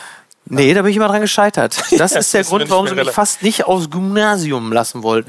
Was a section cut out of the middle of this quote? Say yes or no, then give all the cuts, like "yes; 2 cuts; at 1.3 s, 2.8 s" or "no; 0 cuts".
no; 0 cuts